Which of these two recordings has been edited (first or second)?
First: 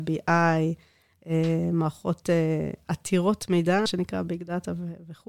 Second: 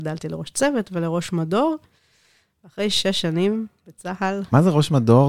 first